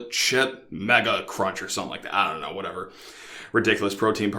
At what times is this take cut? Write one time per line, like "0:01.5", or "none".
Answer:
none